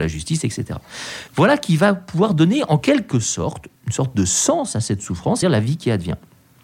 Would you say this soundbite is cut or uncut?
cut